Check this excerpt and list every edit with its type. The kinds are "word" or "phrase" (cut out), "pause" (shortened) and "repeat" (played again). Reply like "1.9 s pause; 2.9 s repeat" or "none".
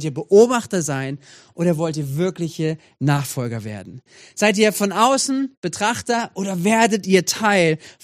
none